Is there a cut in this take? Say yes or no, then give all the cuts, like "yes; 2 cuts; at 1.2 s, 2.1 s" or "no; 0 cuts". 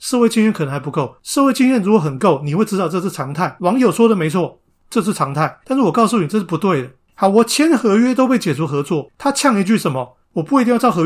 no; 0 cuts